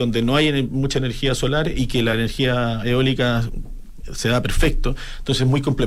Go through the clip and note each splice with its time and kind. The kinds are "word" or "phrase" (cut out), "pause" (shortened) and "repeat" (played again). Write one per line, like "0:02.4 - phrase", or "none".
none